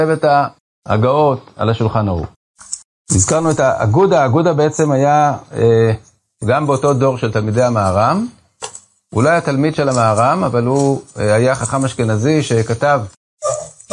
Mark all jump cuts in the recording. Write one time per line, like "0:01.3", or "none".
none

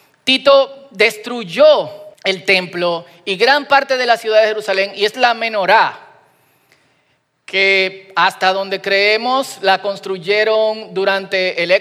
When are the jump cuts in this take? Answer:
0:02.1
0:05.1

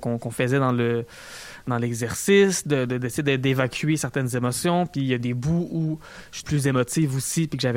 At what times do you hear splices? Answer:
0:06.4

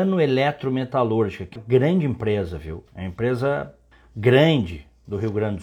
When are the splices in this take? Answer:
0:01.6
0:02.9
0:03.9

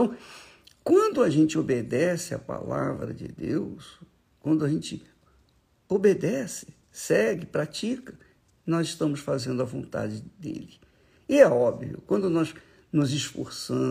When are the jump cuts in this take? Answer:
0:06.8

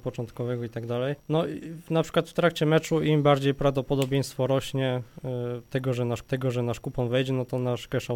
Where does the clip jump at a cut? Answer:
0:01.2
0:06.2

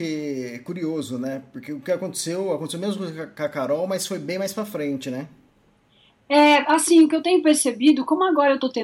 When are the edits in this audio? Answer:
none

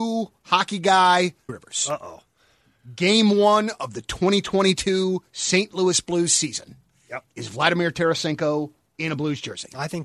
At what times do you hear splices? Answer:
0:01.5

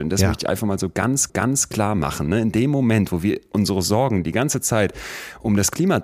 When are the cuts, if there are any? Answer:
0:01.3

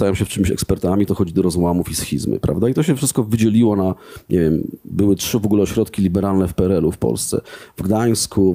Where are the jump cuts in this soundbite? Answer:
0:01.1

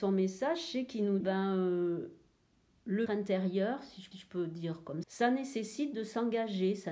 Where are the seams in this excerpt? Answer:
0:01.2
0:03.1
0:04.1
0:05.0

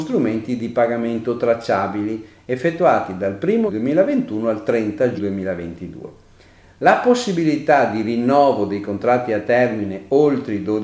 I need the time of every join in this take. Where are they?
0:03.7
0:05.2

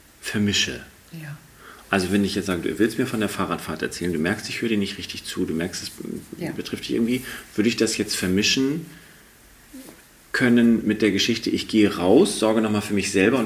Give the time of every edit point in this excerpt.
none

